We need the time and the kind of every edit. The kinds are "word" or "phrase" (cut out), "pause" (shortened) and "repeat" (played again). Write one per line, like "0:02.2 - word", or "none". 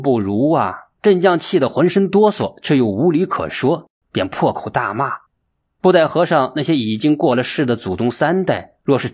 0:01.0 - pause
0:05.3 - pause